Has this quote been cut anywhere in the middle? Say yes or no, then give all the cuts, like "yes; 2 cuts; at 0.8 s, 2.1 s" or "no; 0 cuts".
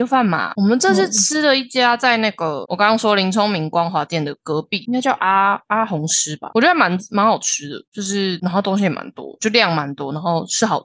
yes; 2 cuts; at 2.6 s, 9.4 s